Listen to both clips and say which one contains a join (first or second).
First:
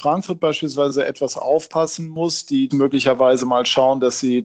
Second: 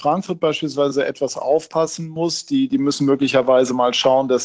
first